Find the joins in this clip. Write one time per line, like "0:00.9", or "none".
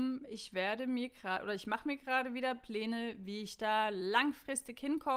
none